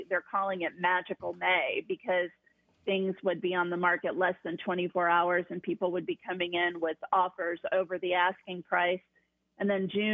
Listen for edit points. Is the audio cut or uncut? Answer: uncut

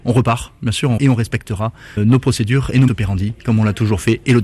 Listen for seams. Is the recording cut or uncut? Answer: cut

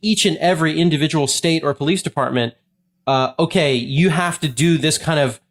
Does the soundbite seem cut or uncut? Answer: uncut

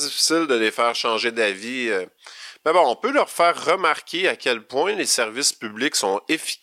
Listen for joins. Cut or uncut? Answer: uncut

